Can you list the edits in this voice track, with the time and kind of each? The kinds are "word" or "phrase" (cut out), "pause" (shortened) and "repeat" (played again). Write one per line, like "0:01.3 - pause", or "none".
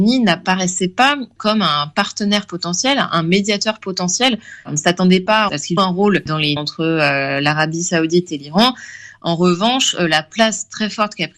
0:05.8 - word
0:06.6 - word

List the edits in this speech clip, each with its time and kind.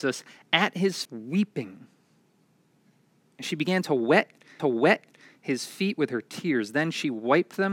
0:01.0 - word
0:04.6 - repeat

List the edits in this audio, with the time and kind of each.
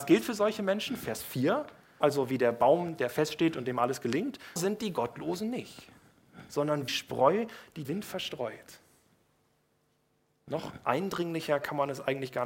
0:02.0 - word
0:04.6 - word
0:06.9 - word
0:07.8 - word

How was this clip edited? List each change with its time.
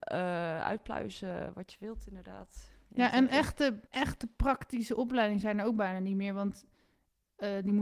0:03.9 - pause

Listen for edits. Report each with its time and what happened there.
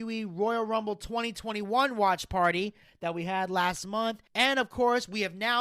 none

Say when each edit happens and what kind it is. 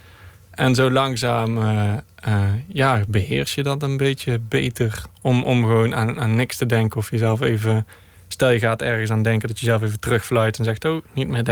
none

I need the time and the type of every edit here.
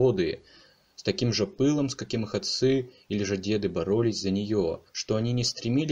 0:04.9 - pause

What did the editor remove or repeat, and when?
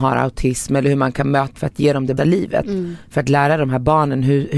0:01.6 - word
0:02.2 - word

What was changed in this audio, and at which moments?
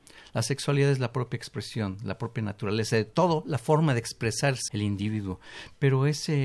0:04.7 - word

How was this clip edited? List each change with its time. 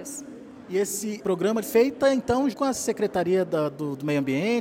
0:01.2 - word
0:01.6 - phrase
0:02.5 - word

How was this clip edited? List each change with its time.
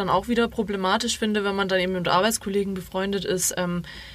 none

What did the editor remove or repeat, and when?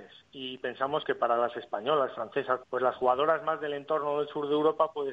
0:02.6 - word

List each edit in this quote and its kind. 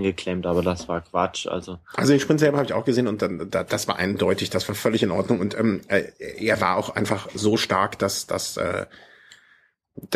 none

